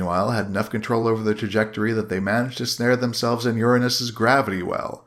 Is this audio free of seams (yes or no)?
yes